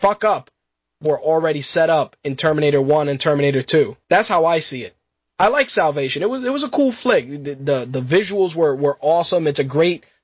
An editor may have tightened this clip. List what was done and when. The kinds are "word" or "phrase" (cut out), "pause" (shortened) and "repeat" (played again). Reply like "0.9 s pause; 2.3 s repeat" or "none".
1.0 s phrase; 4.0 s pause